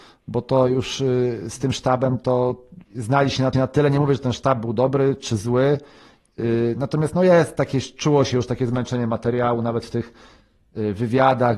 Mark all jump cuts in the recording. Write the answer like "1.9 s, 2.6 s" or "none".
2.9 s, 3.5 s